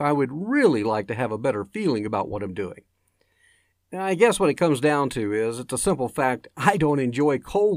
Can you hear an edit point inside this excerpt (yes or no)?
no